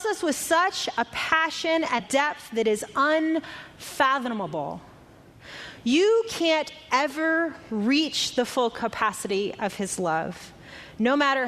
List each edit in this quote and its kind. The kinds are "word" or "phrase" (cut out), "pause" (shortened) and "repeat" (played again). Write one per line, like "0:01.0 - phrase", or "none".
0:02.0 - word